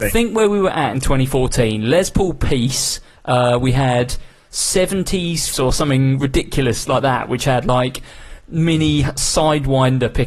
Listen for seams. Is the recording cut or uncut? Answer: cut